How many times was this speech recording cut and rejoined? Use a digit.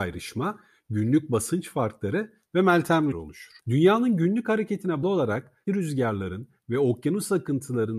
4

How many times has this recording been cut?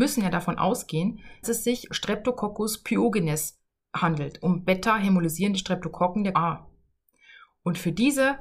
4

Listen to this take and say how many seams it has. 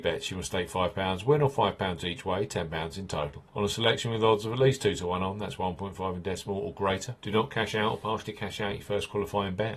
2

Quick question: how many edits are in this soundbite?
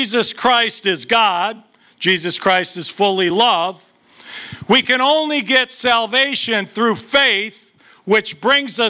0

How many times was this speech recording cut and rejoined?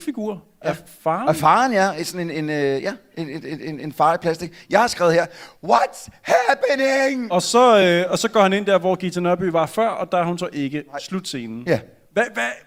0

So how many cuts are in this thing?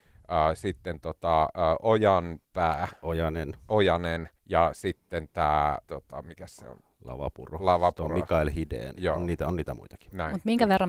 3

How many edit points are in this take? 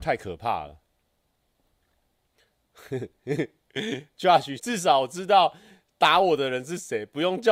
1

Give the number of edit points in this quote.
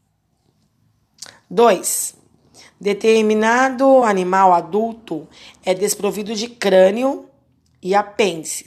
0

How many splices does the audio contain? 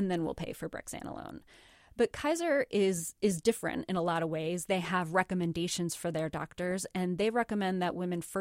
0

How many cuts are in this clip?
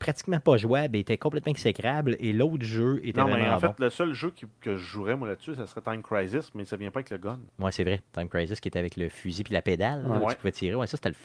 3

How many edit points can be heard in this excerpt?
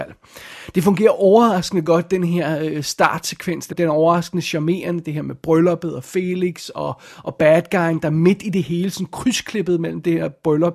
1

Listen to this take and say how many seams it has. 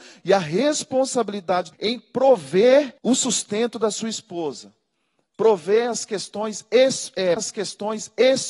3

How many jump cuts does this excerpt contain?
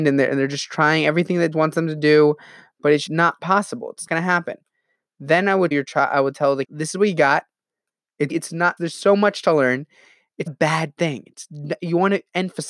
8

